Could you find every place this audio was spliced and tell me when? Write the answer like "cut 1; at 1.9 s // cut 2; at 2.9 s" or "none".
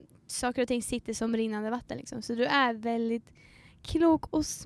none